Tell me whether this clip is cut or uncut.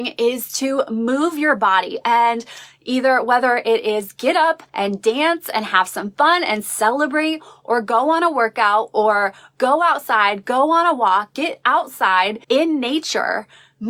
cut